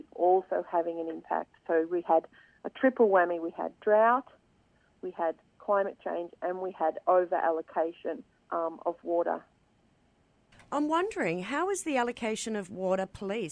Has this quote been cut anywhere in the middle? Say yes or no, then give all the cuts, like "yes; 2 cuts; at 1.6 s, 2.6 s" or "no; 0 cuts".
no; 0 cuts